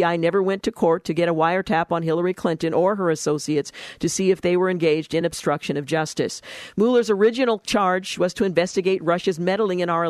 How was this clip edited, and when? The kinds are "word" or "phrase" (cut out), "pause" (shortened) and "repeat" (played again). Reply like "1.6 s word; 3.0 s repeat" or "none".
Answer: none